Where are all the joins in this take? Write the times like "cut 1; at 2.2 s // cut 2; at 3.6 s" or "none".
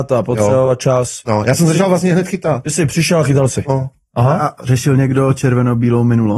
none

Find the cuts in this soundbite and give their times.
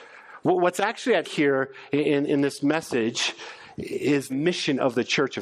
cut 1; at 1.2 s // cut 2; at 4.3 s

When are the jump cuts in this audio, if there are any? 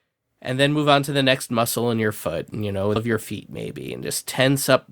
cut 1; at 3.0 s

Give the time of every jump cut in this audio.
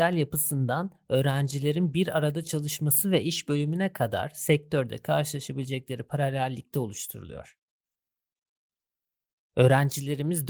none

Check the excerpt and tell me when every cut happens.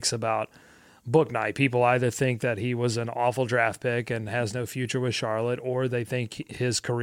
none

